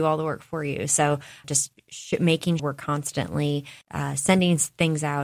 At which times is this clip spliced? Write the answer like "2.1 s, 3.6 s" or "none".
1.4 s, 2.6 s, 3.8 s